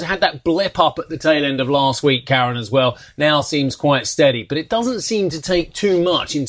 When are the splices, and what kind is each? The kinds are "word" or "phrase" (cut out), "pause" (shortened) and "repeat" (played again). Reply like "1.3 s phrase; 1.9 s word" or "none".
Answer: none